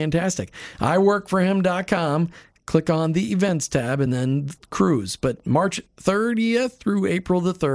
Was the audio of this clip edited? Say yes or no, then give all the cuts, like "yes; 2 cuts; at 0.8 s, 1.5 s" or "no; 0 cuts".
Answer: no; 0 cuts